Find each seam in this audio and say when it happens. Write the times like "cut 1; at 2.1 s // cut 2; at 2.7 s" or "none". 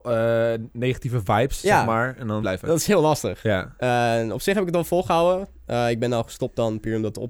cut 1; at 2.4 s

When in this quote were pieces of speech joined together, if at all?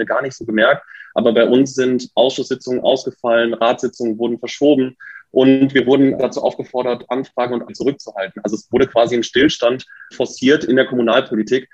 cut 1; at 6.2 s // cut 2; at 7.6 s // cut 3; at 10.1 s

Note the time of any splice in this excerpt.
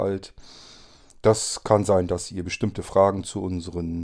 none

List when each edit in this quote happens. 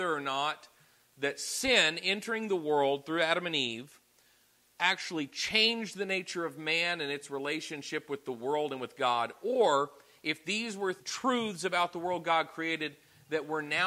cut 1; at 11.0 s

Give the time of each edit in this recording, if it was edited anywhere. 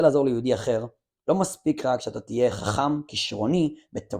cut 1; at 3.1 s

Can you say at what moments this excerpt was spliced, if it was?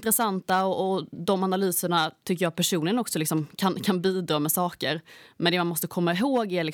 none

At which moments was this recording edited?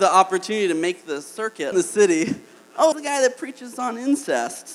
cut 1; at 1.7 s // cut 2; at 2.9 s

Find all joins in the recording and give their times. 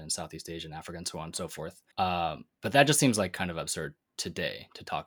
cut 1; at 1.9 s

